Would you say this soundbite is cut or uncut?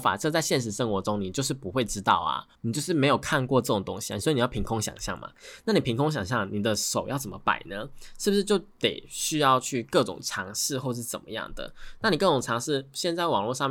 cut